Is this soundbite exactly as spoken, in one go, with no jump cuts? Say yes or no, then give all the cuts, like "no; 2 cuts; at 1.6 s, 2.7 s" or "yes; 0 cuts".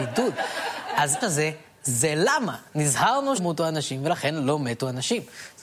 no; 2 cuts; at 1.2 s, 3.4 s